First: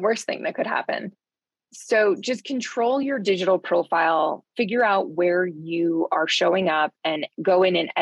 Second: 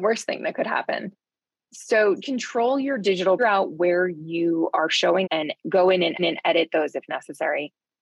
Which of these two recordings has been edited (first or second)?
second